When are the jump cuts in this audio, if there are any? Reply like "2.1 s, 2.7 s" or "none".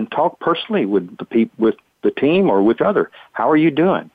1.2 s, 2.8 s